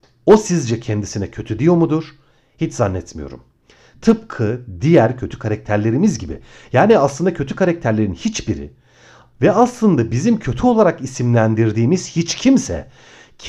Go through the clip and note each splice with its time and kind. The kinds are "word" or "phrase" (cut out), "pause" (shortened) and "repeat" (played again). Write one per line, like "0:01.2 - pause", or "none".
none